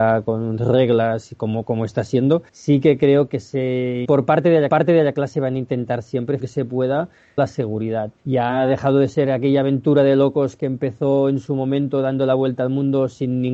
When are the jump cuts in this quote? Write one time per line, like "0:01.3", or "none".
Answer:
0:01.6
0:02.5
0:04.0
0:04.7
0:06.4
0:07.4
0:08.2